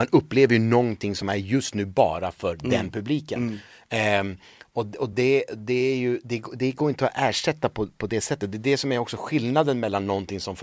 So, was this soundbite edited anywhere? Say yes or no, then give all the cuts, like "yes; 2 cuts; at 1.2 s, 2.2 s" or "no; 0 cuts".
no; 0 cuts